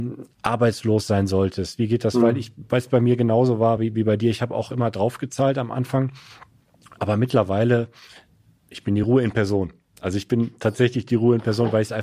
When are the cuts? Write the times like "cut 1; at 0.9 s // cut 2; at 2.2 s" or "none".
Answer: none